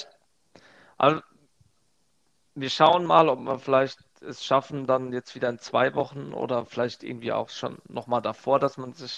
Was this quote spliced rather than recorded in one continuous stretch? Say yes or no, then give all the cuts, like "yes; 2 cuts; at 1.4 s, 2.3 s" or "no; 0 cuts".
no; 0 cuts